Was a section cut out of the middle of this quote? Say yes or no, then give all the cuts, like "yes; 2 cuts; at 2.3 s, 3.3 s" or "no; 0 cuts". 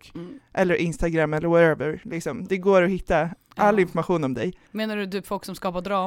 yes; 1 cut; at 4.6 s